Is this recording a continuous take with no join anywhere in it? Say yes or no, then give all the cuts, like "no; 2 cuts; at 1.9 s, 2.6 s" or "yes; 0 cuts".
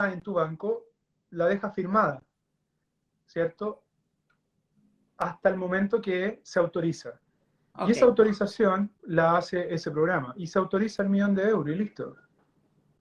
no; 1 cut; at 9.0 s